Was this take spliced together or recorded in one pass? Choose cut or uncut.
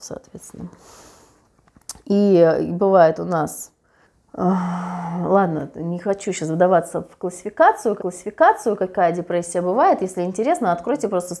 cut